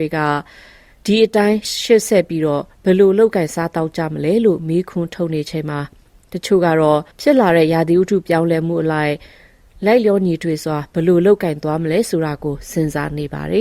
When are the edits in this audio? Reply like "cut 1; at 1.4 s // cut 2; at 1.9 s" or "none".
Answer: cut 1; at 7.1 s